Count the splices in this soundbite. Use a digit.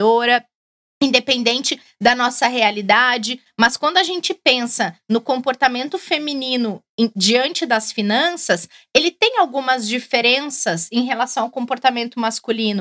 0